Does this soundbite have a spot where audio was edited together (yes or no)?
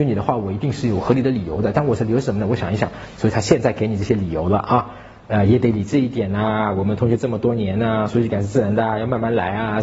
no